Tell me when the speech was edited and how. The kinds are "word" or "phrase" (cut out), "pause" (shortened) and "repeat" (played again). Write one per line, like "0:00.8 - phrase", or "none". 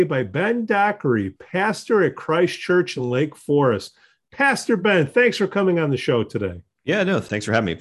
none